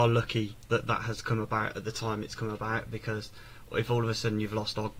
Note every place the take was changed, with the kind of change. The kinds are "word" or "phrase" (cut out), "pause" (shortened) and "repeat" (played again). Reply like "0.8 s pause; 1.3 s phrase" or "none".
none